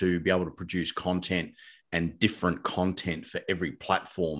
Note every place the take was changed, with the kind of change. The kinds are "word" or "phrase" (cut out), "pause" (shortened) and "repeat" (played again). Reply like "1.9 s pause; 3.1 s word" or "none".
none